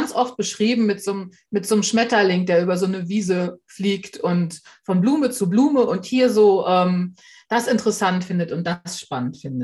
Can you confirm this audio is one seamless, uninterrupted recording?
yes; 0 cuts

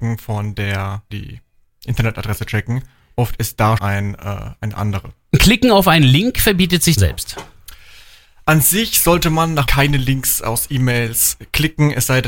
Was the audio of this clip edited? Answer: yes; 4 cuts; at 1.1 s, 3.8 s, 7.0 s, 9.7 s

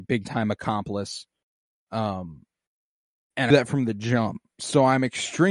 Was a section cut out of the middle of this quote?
yes; 2 cuts; at 2.9 s, 3.5 s

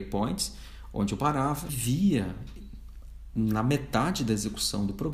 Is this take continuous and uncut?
no; 1 cut; at 1.7 s

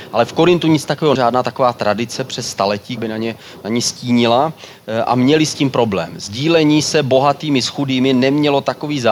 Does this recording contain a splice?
yes; 2 cuts; at 1.2 s, 3.0 s

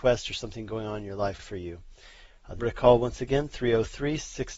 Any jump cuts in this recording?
yes; 2 cuts; at 1.4 s, 2.6 s

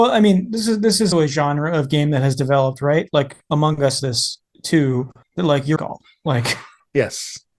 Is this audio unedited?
no; 3 cuts; at 1.1 s, 4.0 s, 5.8 s

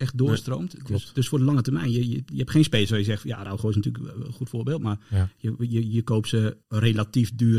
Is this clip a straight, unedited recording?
no; 1 cut; at 6.6 s

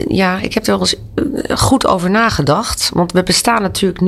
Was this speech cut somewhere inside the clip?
no; 0 cuts

